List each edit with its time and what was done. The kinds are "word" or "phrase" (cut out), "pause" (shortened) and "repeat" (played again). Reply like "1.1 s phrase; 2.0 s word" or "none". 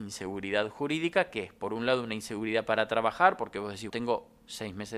3.9 s word